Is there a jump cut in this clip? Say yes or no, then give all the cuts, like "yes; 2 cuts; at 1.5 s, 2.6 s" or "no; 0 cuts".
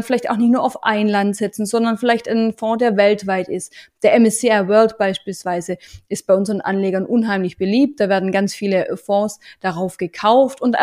no; 0 cuts